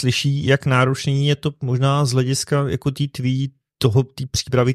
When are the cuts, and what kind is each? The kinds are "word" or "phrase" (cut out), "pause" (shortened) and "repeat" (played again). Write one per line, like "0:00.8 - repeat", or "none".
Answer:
none